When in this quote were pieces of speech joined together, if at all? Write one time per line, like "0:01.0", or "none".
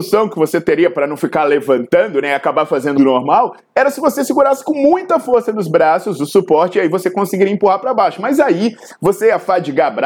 0:03.0